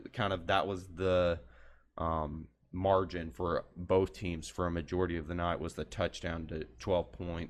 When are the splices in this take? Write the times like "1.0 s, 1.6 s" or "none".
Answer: none